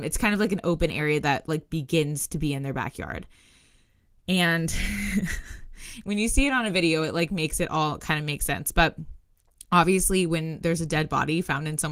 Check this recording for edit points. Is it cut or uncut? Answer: uncut